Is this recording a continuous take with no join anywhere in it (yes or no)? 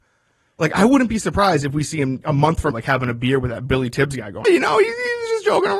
no